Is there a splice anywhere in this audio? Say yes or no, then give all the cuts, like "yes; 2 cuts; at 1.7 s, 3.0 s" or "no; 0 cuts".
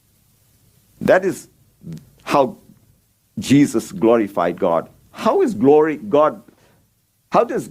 no; 0 cuts